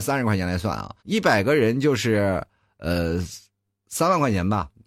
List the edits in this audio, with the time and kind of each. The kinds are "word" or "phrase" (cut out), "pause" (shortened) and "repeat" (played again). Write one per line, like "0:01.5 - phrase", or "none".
0:01.0 - pause